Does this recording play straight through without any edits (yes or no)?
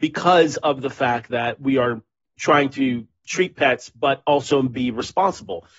yes